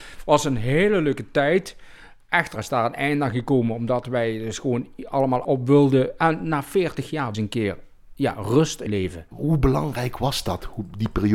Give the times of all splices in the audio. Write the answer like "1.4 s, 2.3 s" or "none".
2.6 s, 5.4 s, 7.3 s, 8.9 s

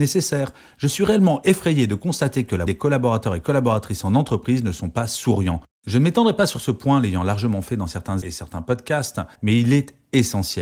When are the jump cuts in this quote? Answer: 2.7 s, 8.2 s, 9.3 s

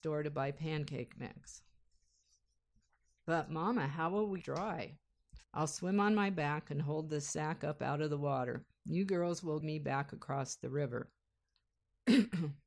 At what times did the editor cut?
2.2 s, 4.4 s, 5.4 s, 9.6 s

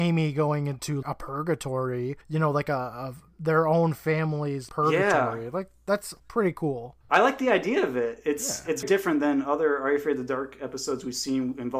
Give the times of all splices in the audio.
1.0 s, 2.2 s, 4.7 s, 6.2 s, 7.0 s, 8.8 s

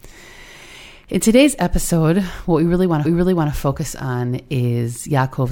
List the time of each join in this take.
3.0 s

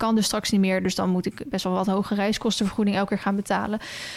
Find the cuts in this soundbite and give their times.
none

